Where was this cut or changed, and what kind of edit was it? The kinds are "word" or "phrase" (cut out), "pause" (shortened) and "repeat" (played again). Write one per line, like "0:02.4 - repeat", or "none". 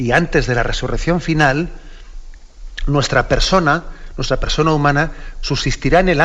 none